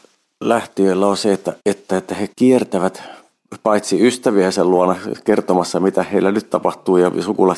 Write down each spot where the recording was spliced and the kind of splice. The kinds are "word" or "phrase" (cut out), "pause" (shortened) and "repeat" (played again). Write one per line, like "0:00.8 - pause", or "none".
0:01.6 - pause
0:02.3 - pause